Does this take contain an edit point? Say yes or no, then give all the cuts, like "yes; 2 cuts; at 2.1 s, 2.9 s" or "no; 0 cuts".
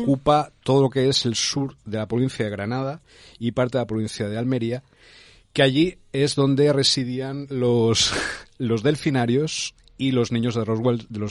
no; 0 cuts